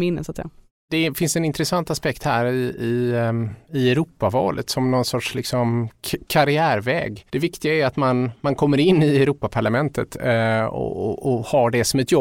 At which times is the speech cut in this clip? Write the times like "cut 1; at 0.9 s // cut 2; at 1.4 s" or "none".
cut 1; at 7.3 s